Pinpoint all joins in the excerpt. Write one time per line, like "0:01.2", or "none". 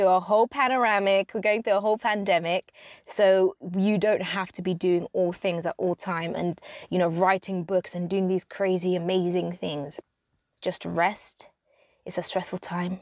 none